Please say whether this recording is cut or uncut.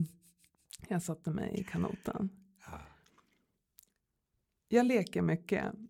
uncut